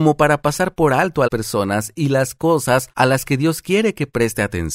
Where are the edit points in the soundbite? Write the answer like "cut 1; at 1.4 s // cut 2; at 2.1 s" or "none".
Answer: cut 1; at 1.3 s